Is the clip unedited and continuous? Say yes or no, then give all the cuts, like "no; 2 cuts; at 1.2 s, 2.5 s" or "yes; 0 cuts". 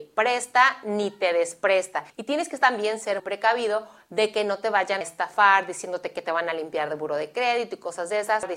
no; 3 cuts; at 2.1 s, 3.2 s, 5.0 s